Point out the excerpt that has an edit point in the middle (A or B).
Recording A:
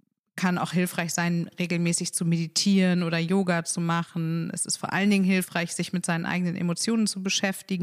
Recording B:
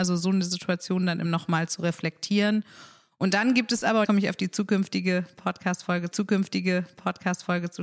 B